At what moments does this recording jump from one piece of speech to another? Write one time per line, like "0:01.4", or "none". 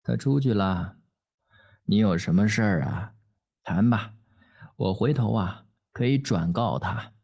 none